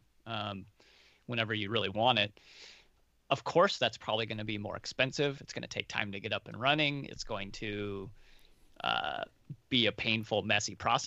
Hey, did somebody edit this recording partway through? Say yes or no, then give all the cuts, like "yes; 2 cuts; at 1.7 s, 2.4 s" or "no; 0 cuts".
no; 0 cuts